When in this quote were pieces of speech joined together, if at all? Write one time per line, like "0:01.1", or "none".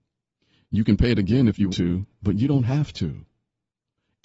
0:01.7